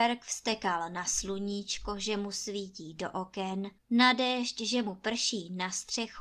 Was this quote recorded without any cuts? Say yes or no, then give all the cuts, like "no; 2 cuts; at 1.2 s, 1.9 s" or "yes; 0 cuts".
no; 1 cut; at 3.8 s